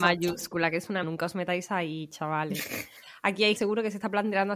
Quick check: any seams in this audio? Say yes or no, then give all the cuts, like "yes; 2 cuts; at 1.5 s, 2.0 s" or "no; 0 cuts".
yes; 2 cuts; at 1.0 s, 3.6 s